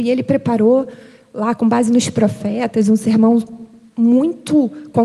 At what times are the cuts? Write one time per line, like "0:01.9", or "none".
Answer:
none

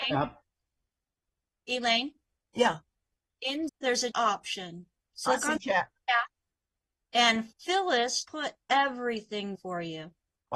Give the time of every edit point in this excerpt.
0:03.7
0:04.1
0:05.3
0:08.2
0:09.5

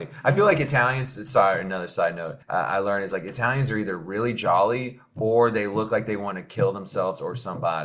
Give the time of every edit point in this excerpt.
0:02.4

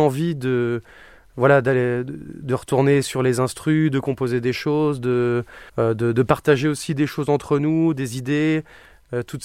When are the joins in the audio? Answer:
0:05.7

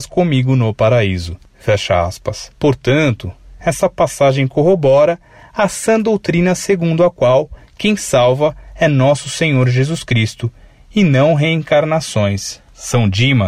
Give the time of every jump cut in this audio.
none

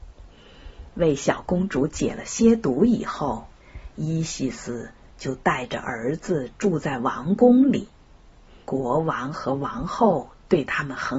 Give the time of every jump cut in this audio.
0:08.6

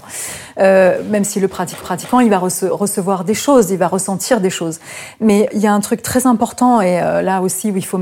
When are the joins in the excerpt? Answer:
0:01.8
0:05.5

